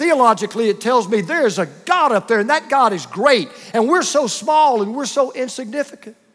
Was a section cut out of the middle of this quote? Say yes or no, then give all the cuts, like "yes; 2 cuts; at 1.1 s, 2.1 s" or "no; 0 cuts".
no; 0 cuts